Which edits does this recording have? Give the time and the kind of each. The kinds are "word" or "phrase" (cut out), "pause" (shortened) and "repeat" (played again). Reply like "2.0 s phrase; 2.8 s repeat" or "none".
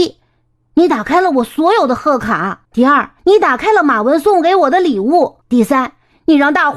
2.7 s pause; 3.2 s pause; 5.4 s pause